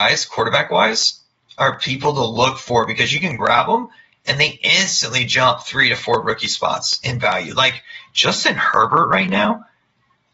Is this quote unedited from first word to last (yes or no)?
yes